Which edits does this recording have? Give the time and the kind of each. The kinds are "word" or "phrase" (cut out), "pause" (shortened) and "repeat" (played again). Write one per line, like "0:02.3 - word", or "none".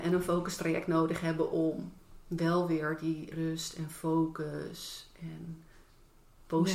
0:02.0 - pause
0:03.3 - word